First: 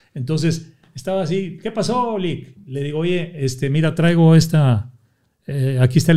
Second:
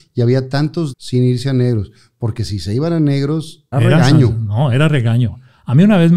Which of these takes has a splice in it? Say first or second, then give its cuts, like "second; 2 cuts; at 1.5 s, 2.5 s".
second; 2 cuts; at 0.9 s, 3.7 s